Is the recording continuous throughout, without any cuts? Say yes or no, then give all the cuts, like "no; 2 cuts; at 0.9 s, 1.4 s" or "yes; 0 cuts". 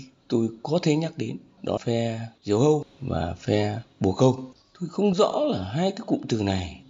no; 1 cut; at 1.8 s